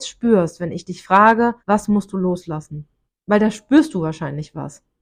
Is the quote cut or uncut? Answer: cut